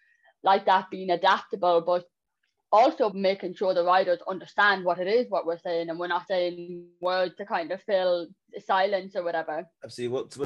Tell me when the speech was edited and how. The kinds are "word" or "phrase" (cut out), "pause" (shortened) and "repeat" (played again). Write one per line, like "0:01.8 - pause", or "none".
0:03.1 - phrase
0:06.3 - word